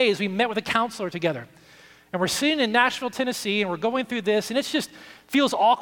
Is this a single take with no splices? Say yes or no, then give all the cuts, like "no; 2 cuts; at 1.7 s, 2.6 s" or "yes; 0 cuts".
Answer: yes; 0 cuts